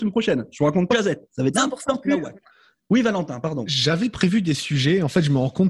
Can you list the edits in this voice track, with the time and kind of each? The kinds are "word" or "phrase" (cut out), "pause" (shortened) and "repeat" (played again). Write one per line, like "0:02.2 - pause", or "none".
0:00.9 - phrase
0:01.5 - word